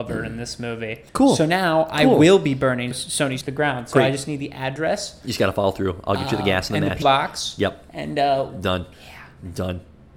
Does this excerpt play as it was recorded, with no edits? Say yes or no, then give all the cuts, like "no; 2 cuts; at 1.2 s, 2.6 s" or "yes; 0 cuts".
no; 5 cuts; at 1.1 s, 2.9 s, 3.4 s, 7.0 s, 8.9 s